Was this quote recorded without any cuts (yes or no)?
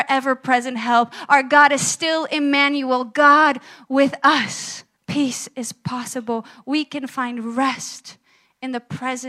no